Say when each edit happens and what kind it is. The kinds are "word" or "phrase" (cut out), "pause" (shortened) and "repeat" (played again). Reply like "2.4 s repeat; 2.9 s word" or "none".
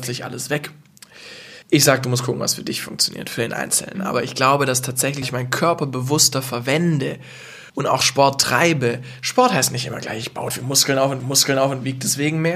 1.6 s pause; 5.2 s word; 7.7 s pause; 10.5 s word; 11.2 s repeat